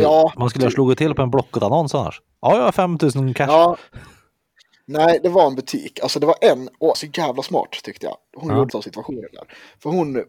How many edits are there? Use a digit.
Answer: 2